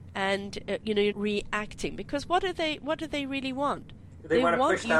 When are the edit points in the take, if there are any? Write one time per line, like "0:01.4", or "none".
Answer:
0:01.1